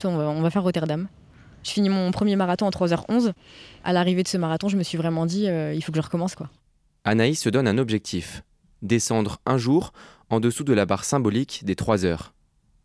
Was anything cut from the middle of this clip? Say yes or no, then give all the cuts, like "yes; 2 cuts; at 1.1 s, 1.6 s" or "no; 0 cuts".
no; 0 cuts